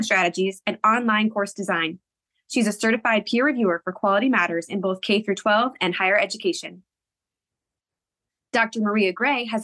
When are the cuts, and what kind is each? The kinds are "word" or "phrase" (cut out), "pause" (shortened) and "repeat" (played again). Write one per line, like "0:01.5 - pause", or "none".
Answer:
none